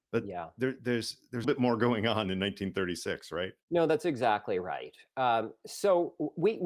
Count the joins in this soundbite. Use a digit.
2